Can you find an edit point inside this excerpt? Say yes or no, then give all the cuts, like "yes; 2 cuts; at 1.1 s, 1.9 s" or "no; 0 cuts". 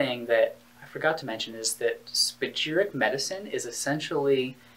no; 0 cuts